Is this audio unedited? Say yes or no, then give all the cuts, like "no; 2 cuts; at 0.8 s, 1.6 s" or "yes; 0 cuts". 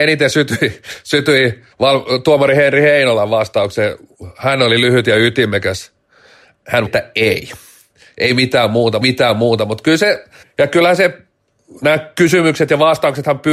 no; 4 cuts; at 1.7 s, 6.9 s, 9.0 s, 10.4 s